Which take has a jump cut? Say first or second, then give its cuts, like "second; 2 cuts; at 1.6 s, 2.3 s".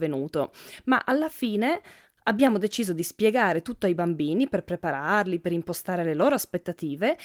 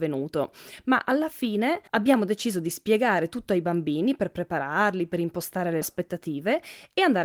second; 2 cuts; at 1.9 s, 5.8 s